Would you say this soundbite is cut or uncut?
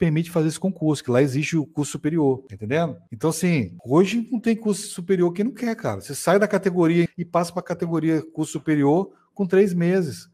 cut